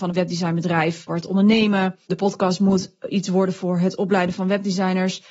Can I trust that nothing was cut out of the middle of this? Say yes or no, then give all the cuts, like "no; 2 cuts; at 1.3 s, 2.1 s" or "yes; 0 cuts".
no; 2 cuts; at 1.1 s, 2.0 s